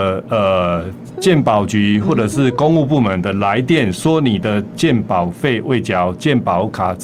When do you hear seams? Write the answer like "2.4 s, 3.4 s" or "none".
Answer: 1.1 s